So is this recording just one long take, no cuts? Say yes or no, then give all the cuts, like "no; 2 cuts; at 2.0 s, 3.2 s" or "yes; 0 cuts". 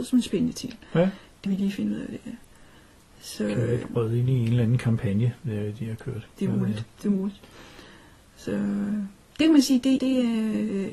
no; 3 cuts; at 1.5 s, 3.8 s, 10.0 s